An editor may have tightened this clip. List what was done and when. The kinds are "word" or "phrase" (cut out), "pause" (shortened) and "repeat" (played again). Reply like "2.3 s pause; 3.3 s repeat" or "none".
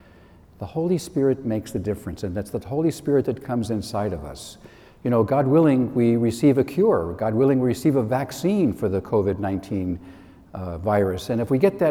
none